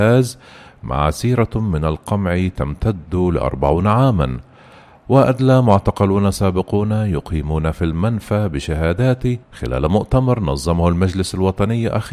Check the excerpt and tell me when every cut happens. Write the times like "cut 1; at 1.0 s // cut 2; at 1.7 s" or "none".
cut 1; at 9.4 s

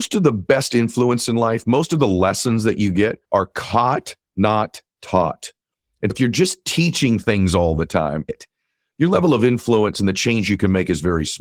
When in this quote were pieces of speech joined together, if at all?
cut 1; at 3.2 s // cut 2; at 6.1 s // cut 3; at 8.3 s

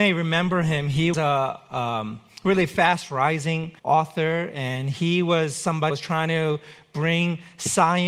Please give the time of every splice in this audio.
cut 1; at 1.1 s // cut 2; at 3.8 s // cut 3; at 5.9 s

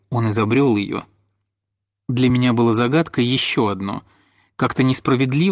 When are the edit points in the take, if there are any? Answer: none

